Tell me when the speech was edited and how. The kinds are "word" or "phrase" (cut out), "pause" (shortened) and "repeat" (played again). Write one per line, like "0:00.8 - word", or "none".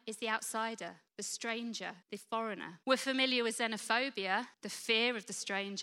0:01.1 - pause
0:02.0 - pause
0:02.8 - pause
0:04.5 - pause